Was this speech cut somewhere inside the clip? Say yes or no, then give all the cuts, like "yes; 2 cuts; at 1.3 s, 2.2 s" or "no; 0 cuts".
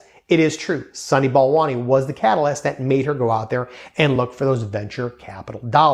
no; 0 cuts